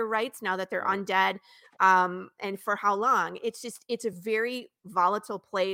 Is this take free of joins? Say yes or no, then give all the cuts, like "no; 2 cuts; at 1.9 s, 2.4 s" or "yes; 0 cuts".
yes; 0 cuts